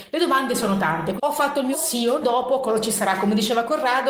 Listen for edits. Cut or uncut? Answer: cut